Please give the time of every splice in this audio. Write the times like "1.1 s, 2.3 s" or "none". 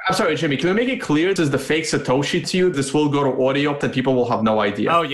1.4 s, 2.4 s, 2.7 s, 3.8 s